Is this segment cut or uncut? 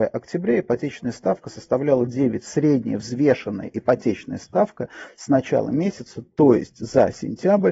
uncut